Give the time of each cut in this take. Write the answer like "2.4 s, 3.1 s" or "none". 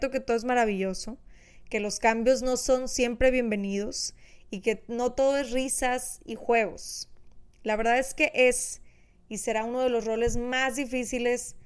none